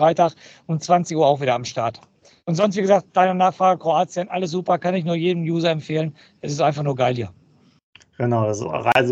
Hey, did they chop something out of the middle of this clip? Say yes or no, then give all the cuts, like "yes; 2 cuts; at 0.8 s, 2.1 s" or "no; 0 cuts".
no; 0 cuts